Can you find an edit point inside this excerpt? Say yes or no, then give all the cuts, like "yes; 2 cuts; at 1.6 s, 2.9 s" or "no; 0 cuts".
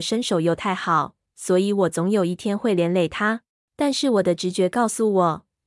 yes; 1 cut; at 3.5 s